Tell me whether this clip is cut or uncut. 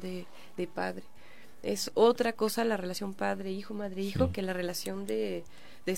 uncut